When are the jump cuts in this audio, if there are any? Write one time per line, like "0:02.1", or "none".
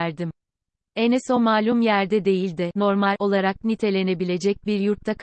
none

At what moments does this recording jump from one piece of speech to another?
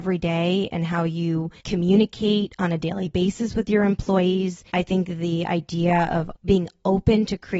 0:01.6
0:04.7
0:06.3

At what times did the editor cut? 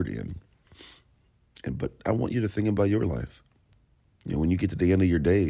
none

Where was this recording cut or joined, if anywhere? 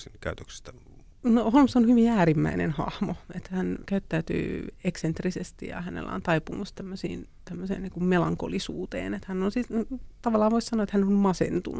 none

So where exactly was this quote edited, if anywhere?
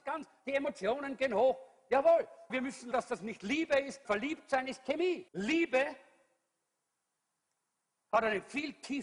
0:02.5
0:02.9
0:04.0
0:05.3

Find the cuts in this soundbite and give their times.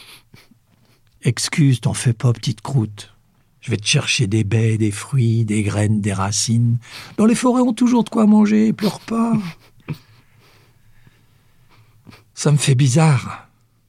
0:07.7

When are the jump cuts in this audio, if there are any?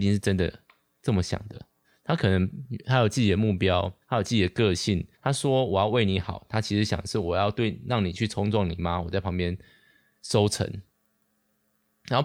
0:01.8
0:04.0
0:05.1

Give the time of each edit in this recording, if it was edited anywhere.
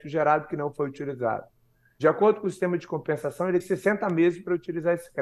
0:03.6

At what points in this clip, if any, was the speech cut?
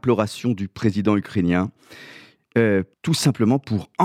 0:02.9

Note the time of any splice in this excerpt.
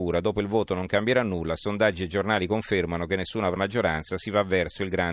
0:03.6

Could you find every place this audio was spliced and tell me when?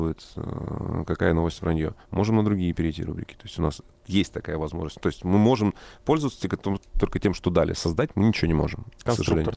none

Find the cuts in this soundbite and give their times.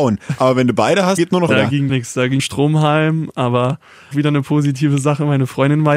0:01.2
0:01.5
0:01.9
0:02.4
0:04.1

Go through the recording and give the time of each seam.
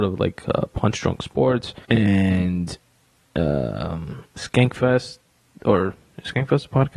0:01.8

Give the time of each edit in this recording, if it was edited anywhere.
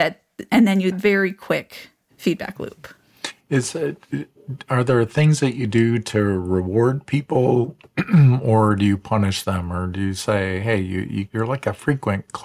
0:00.9
0:11.3

